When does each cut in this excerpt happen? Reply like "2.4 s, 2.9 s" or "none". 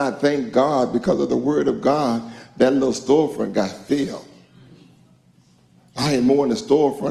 none